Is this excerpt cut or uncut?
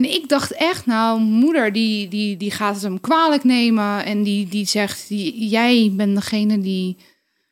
uncut